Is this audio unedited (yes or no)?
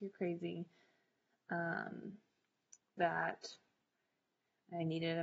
no